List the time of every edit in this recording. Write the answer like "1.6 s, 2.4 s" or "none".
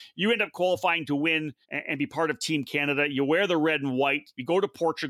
1.6 s